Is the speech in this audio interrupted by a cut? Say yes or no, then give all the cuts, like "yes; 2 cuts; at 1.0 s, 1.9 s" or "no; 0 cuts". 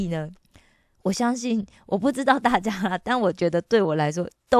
no; 0 cuts